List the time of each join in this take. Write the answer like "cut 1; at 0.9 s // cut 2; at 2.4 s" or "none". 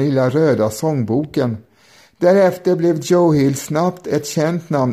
none